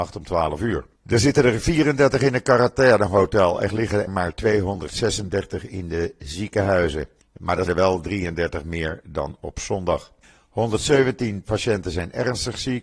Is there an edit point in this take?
yes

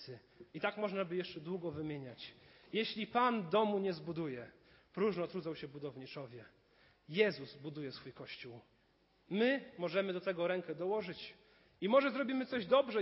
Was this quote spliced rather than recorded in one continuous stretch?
no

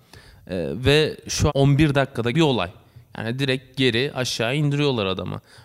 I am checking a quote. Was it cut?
yes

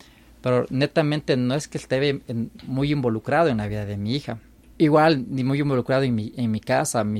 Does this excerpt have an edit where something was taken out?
no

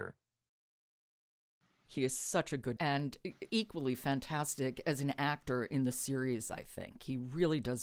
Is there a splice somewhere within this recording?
yes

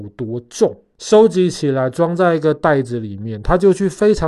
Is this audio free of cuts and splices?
no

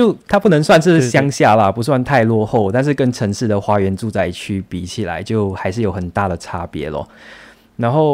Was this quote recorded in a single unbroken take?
yes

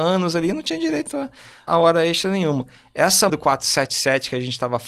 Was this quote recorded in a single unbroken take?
no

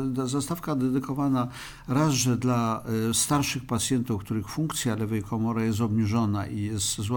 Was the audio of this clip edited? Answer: no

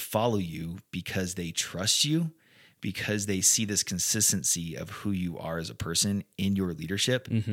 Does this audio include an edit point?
no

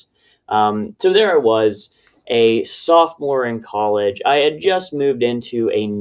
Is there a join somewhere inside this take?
no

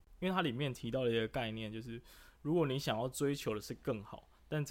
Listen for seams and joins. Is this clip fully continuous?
yes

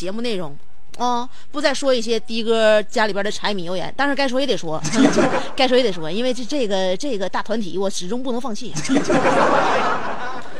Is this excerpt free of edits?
yes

